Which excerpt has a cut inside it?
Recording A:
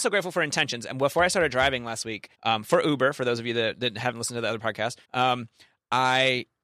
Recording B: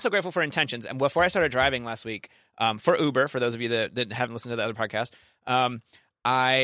A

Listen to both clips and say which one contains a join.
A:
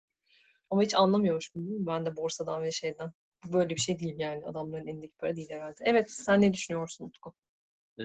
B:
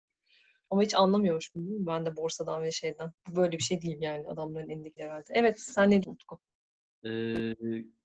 B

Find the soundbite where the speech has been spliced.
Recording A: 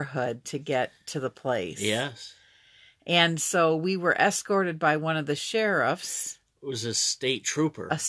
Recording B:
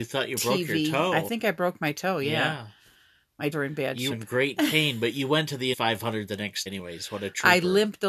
B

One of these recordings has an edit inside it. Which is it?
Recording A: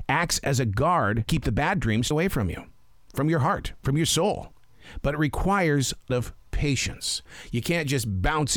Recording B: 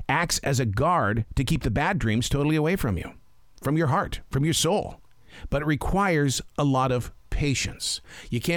A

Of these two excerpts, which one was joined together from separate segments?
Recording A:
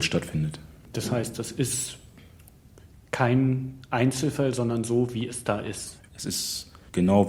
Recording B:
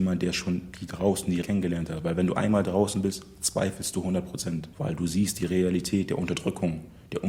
B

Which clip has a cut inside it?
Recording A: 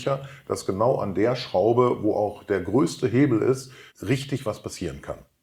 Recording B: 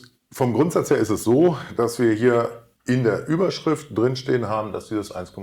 A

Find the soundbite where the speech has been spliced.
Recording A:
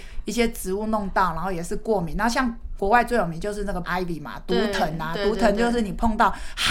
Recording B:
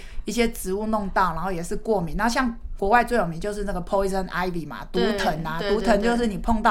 A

